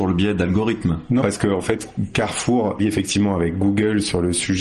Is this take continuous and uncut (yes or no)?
no